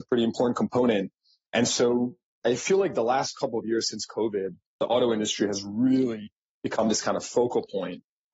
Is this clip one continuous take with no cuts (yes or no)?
yes